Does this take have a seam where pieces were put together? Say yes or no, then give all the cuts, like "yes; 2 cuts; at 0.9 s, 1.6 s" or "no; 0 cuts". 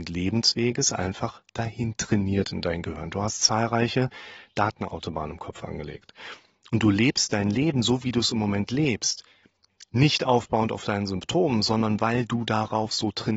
no; 0 cuts